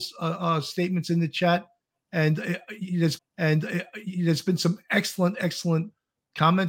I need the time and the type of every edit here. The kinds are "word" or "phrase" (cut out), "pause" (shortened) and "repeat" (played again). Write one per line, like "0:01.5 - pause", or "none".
0:03.2 - repeat